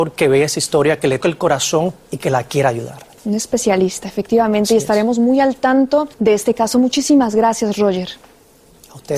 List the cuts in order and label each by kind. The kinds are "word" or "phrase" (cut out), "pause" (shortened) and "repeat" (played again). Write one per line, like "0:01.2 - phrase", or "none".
0:01.2 - word
0:06.1 - pause